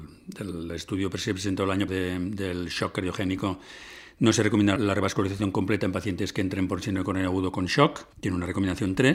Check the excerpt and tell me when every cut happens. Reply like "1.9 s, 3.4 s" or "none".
1.9 s, 4.8 s, 8.1 s